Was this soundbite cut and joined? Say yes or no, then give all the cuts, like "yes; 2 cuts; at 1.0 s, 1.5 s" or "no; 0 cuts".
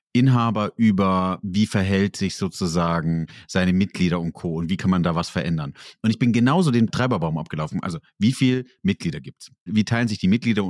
no; 0 cuts